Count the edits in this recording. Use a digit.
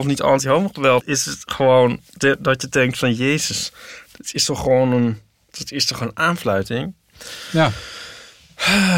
1